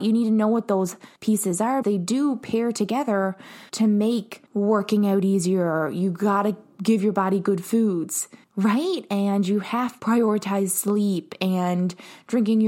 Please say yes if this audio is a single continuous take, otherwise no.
no